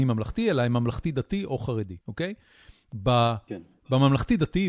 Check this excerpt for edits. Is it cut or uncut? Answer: cut